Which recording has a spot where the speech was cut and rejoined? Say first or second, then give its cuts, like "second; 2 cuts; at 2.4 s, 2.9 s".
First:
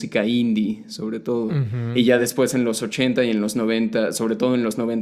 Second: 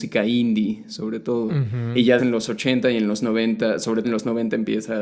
second; 2 cuts; at 2.2 s, 4.0 s